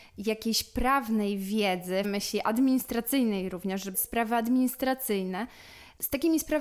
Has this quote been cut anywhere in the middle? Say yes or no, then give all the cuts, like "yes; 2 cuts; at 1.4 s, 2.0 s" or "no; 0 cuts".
yes; 2 cuts; at 2.0 s, 3.9 s